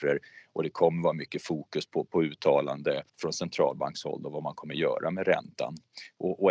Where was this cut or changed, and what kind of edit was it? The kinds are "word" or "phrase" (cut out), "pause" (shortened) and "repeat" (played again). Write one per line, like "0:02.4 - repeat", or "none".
0:03.1 - pause